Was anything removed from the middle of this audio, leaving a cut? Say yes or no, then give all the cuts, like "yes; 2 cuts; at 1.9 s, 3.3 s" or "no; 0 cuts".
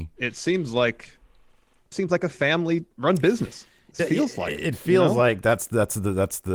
yes; 3 cuts; at 1.9 s, 2.9 s, 4.0 s